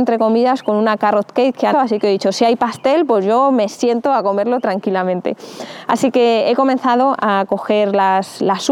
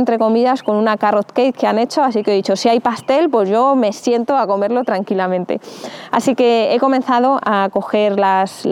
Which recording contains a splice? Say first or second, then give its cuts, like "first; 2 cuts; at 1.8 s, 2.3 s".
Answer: first; 1 cut; at 1.7 s